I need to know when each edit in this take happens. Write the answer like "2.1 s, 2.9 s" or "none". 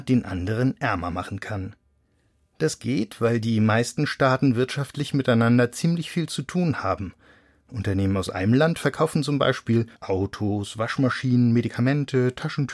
9.9 s